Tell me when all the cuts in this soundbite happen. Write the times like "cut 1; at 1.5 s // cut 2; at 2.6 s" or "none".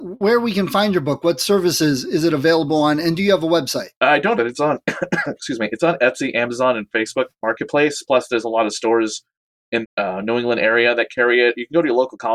cut 1; at 4.0 s // cut 2; at 4.4 s // cut 3; at 7.3 s // cut 4; at 9.8 s